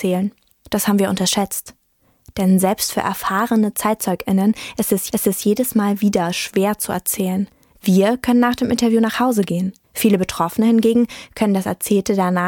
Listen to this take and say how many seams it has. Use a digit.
2